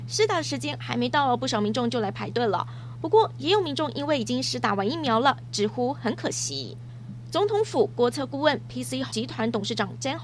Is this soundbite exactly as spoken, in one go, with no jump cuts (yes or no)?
no